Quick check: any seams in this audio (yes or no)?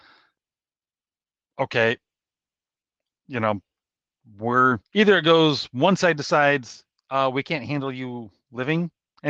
yes